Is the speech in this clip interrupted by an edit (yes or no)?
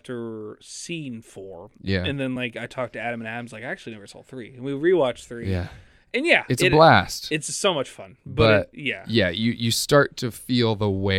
no